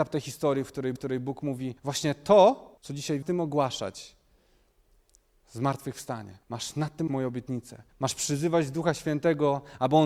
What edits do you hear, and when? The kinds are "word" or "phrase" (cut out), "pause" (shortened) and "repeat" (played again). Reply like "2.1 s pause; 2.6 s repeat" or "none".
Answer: 1.0 s repeat; 1.8 s pause; 2.8 s pause; 3.2 s phrase; 6.4 s pause; 7.1 s word; 7.9 s pause